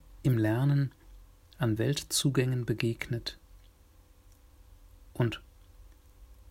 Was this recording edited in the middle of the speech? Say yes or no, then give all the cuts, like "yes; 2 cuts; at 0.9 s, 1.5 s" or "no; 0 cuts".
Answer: no; 0 cuts